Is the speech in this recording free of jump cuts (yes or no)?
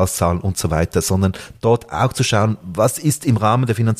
yes